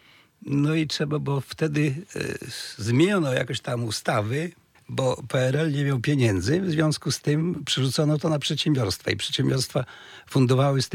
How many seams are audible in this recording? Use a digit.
0